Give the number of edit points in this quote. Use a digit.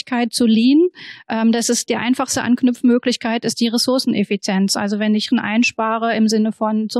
1